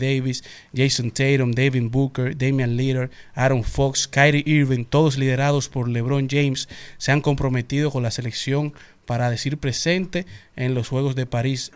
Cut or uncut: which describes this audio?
uncut